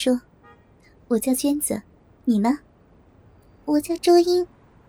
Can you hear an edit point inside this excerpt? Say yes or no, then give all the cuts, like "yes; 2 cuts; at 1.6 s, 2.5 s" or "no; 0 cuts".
yes; 1 cut; at 3.6 s